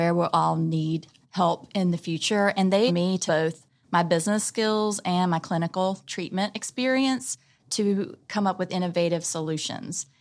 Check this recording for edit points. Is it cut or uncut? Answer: cut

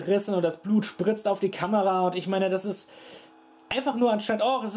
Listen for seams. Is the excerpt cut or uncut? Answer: uncut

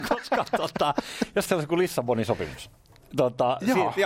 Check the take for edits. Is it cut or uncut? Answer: cut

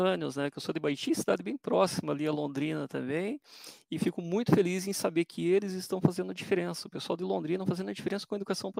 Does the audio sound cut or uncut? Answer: uncut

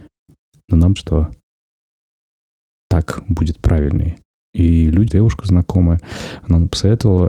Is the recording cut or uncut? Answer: cut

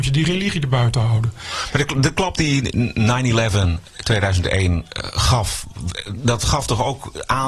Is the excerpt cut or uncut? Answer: uncut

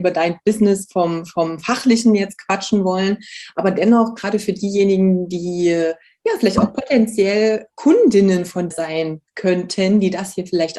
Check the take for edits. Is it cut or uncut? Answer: cut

